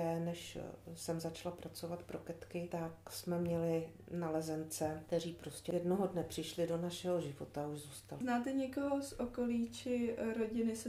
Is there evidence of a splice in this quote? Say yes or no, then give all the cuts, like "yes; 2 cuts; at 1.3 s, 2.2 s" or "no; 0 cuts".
no; 0 cuts